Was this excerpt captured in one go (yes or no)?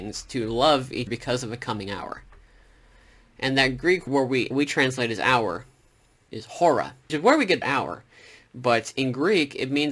no